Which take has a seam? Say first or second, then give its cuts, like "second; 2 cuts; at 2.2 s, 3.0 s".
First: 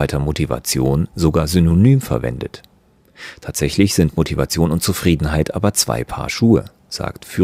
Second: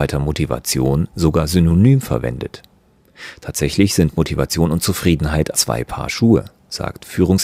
second; 1 cut; at 5.5 s